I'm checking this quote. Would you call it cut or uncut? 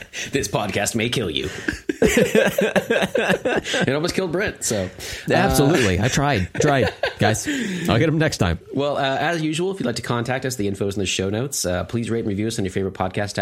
cut